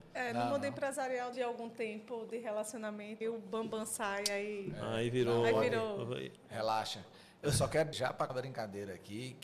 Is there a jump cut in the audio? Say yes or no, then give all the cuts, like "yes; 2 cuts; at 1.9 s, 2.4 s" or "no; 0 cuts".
yes; 4 cuts; at 1.3 s, 3.2 s, 7.9 s, 8.3 s